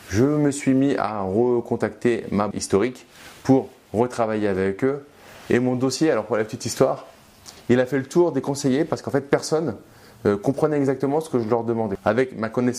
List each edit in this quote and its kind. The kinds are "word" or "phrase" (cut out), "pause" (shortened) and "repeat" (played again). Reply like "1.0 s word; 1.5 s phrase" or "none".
2.5 s word